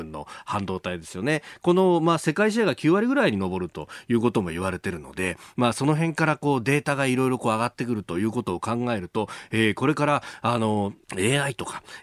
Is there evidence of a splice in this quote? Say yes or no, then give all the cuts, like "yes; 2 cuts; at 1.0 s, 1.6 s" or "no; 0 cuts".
yes; 1 cut; at 11.0 s